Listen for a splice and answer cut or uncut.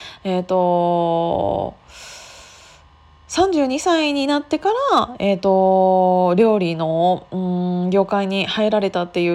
uncut